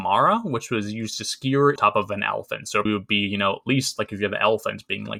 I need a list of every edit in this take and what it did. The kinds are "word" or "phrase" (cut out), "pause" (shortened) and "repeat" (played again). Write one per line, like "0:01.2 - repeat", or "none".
0:01.8 - phrase
0:02.9 - word